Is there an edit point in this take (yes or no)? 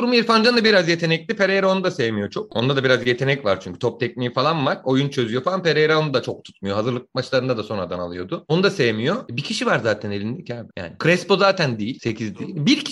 no